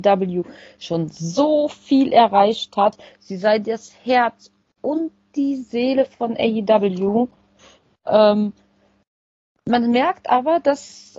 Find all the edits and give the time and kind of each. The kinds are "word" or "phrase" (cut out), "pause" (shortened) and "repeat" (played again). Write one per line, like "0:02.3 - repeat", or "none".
none

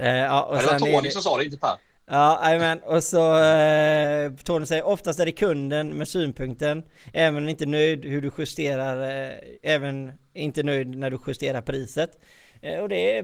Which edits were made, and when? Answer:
none

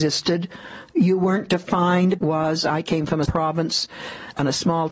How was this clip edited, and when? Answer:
0:02.2 - phrase
0:03.2 - word

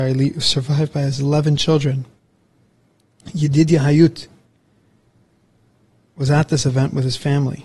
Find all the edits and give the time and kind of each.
none

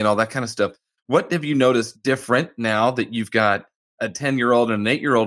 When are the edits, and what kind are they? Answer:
none

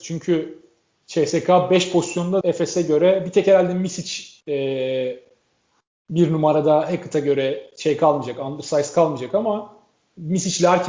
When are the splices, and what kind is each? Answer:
0:02.4 - word
0:04.4 - pause

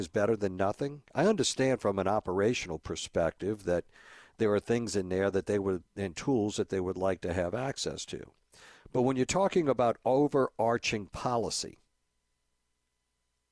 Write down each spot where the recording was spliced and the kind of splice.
none

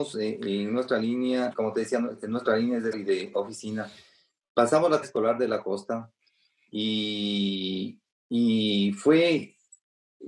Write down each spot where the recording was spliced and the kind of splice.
0:01.5 - word
0:02.9 - word
0:05.0 - word

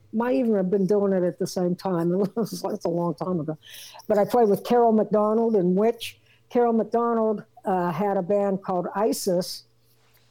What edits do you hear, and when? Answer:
none

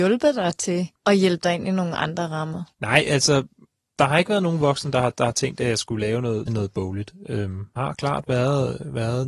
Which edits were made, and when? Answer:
0:01.0 - pause
0:02.7 - pause
0:06.5 - phrase
0:07.8 - word

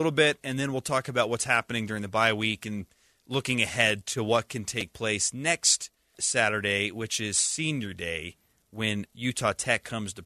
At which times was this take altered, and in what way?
0:06.1 - word

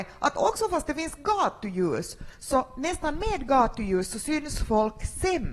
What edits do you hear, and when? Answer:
none

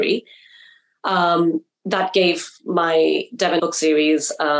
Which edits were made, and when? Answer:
0:01.7 - pause
0:03.6 - word

